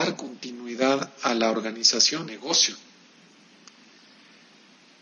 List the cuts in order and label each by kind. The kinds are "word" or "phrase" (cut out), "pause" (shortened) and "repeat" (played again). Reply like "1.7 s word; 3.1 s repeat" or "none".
2.3 s word